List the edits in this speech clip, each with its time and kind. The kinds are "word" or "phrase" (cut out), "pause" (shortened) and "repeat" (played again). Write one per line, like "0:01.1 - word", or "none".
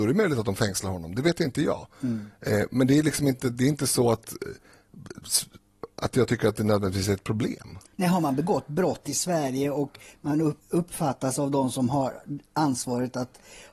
0:07.9 - pause
0:10.6 - pause